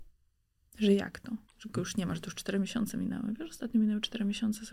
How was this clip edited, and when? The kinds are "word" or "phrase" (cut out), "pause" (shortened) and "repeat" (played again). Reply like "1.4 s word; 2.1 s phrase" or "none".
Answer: 1.5 s pause